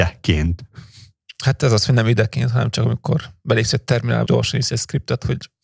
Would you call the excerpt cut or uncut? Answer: cut